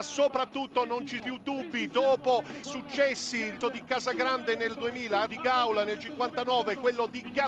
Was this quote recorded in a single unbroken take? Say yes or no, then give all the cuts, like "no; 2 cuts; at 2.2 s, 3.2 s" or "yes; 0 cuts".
no; 4 cuts; at 1.2 s, 2.6 s, 3.6 s, 5.3 s